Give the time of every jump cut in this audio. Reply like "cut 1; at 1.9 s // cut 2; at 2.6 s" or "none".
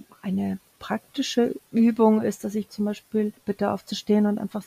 cut 1; at 1.7 s // cut 2; at 2.7 s // cut 3; at 3.4 s